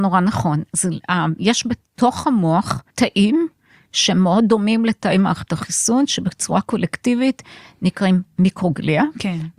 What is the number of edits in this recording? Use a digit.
1